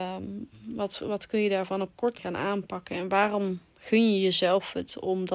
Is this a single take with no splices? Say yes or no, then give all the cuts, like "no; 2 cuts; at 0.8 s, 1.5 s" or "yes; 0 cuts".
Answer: no; 1 cut; at 2.2 s